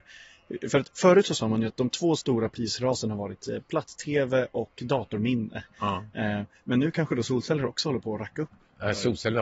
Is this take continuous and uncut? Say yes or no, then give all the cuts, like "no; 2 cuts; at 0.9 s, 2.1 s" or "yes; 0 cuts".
yes; 0 cuts